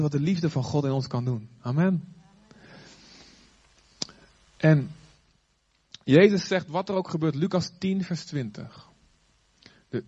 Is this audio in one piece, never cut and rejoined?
yes; 0 cuts

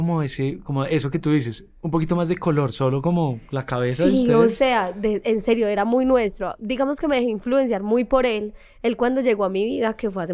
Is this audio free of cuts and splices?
yes; 0 cuts

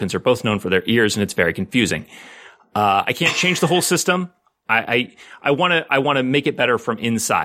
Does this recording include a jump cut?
no; 0 cuts

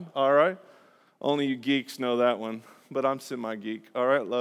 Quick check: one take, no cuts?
yes; 0 cuts

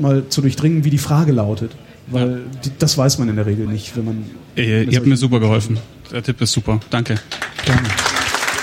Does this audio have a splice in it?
no; 0 cuts

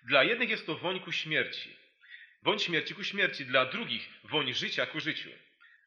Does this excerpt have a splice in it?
no; 0 cuts

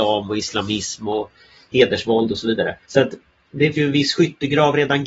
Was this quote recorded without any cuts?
no; 2 cuts; at 2.8 s, 3.7 s

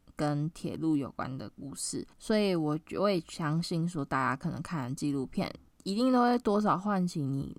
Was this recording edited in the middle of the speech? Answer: yes; 2 cuts; at 2.1 s, 5.7 s

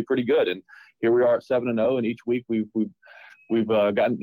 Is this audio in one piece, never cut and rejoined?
yes; 0 cuts

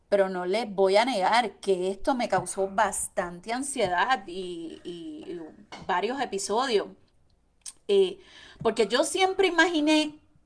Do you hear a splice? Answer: no; 0 cuts

